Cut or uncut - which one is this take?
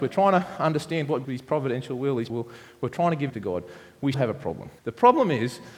cut